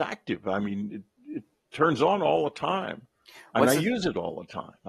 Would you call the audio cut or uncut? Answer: uncut